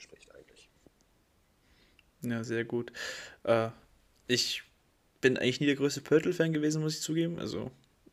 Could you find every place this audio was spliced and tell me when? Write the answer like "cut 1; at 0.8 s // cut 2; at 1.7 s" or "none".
none